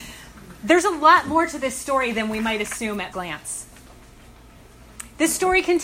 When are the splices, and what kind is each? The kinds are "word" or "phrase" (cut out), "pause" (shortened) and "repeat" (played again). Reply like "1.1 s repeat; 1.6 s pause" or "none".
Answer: 3.1 s word